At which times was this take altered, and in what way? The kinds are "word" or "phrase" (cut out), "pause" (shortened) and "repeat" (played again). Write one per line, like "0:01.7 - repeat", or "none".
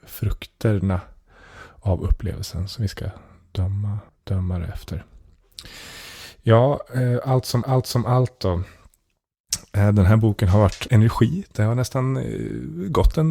0:04.1 - pause
0:07.6 - repeat
0:10.9 - phrase